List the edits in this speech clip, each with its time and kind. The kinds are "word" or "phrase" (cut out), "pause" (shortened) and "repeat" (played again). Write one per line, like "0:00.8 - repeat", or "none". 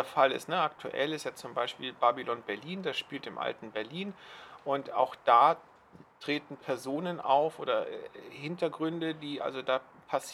none